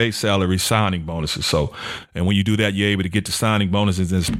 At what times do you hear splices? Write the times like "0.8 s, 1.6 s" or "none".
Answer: none